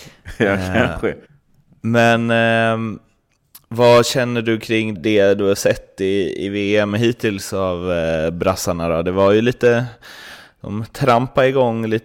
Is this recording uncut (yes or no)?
no